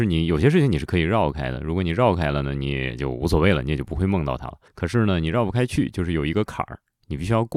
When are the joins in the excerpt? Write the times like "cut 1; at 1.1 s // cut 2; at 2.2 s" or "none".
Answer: cut 1; at 4.7 s